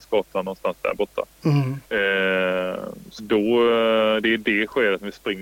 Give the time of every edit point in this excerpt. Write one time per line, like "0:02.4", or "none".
0:01.8
0:03.2